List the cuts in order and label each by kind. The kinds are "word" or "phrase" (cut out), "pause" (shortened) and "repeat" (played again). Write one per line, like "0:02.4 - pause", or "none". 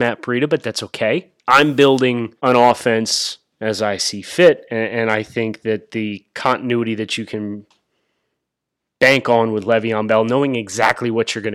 0:01.4 - pause
0:02.4 - pause